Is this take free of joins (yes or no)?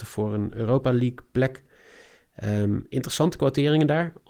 yes